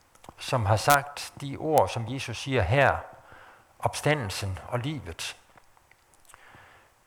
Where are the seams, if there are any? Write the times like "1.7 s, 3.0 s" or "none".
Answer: none